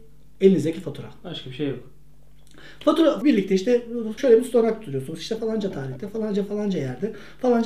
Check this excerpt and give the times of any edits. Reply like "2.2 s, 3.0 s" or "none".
3.2 s, 4.2 s, 5.4 s